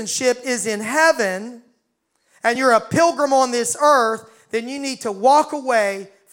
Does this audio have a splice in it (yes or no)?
no